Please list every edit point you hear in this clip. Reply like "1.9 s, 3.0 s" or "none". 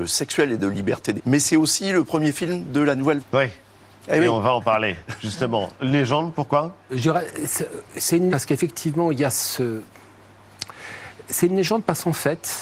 1.2 s, 3.2 s, 8.3 s